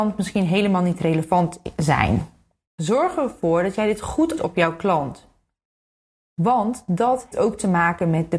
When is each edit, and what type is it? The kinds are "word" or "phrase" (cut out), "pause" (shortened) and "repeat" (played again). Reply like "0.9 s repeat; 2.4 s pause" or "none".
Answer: 4.4 s word; 7.3 s word